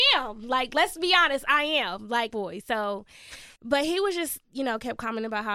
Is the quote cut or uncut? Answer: cut